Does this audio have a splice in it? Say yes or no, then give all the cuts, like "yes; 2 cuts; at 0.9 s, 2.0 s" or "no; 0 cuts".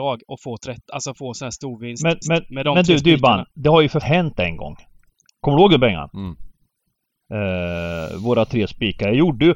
yes; 3 cuts; at 2.2 s, 3.5 s, 4.0 s